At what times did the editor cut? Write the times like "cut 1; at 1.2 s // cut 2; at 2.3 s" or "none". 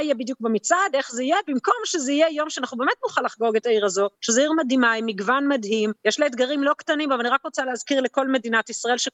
cut 1; at 4.1 s // cut 2; at 6.0 s

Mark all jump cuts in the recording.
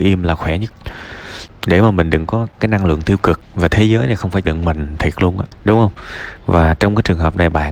cut 1; at 2.6 s // cut 2; at 4.4 s

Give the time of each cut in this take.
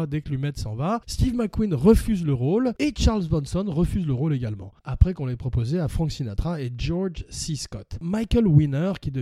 cut 1; at 4.8 s

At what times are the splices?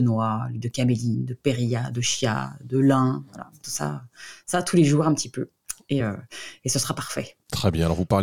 none

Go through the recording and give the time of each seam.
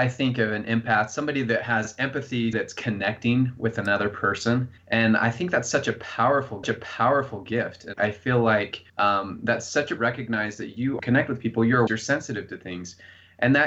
cut 1; at 2.5 s // cut 2; at 4.8 s // cut 3; at 6.6 s // cut 4; at 7.9 s // cut 5; at 8.9 s // cut 6; at 10.0 s // cut 7; at 11.0 s // cut 8; at 11.9 s

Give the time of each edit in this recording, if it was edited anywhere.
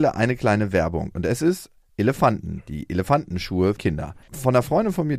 cut 1; at 3.8 s // cut 2; at 4.2 s

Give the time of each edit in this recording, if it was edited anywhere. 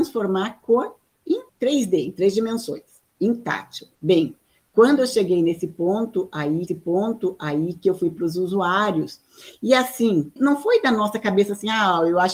cut 1; at 1.5 s // cut 2; at 3.9 s // cut 3; at 6.7 s

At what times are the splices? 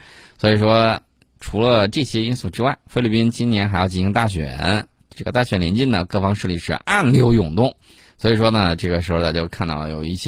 cut 1; at 1.4 s // cut 2; at 8.0 s

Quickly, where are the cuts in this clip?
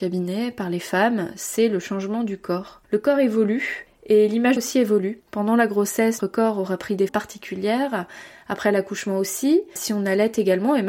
cut 1; at 4.6 s // cut 2; at 5.2 s // cut 3; at 6.2 s // cut 4; at 7.1 s // cut 5; at 9.8 s

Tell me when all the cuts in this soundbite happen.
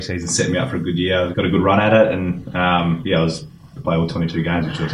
cut 1; at 1.3 s // cut 2; at 3.8 s

